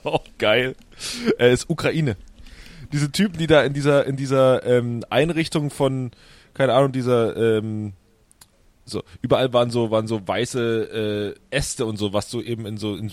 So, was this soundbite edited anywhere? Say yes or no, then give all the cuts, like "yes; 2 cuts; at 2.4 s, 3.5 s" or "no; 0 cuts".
no; 0 cuts